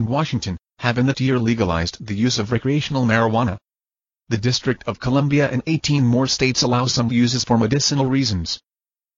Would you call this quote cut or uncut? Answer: cut